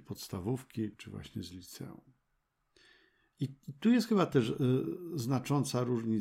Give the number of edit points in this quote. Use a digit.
1